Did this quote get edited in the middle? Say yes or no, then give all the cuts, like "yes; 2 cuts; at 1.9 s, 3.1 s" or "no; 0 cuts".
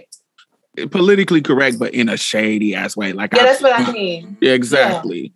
no; 0 cuts